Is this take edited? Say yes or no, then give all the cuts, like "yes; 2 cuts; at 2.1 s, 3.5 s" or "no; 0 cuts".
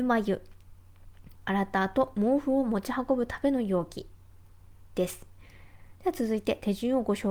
yes; 2 cuts; at 1.4 s, 5.9 s